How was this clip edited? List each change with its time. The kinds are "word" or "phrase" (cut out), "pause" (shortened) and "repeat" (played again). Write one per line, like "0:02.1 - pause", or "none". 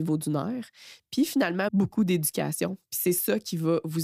0:01.7 - phrase